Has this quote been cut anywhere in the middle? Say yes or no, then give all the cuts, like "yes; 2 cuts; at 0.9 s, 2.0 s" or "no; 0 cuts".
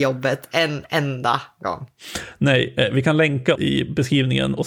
yes; 1 cut; at 3.6 s